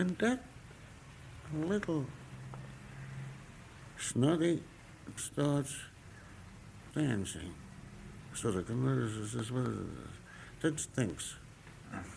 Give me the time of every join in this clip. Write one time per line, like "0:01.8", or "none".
0:05.2
0:06.9
0:10.8